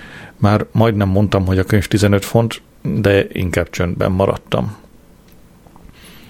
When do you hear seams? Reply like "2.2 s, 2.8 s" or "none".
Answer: none